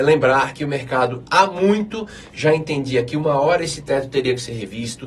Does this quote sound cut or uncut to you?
uncut